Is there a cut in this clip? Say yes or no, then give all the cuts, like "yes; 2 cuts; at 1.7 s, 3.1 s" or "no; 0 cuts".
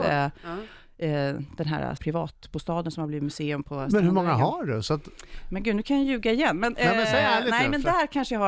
yes; 1 cut; at 2.0 s